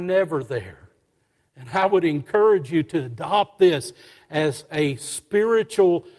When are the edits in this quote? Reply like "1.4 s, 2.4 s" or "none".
none